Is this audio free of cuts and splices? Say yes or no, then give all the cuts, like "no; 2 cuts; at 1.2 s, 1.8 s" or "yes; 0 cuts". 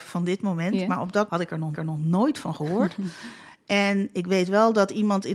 no; 2 cuts; at 1.3 s, 1.7 s